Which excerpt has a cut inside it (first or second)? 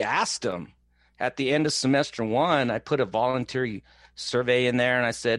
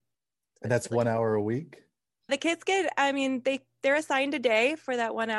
second